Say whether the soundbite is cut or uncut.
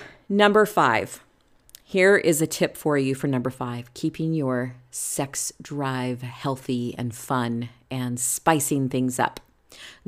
uncut